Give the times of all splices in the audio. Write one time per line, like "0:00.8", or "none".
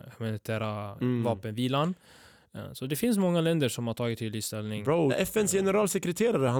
0:00.9
0:05.1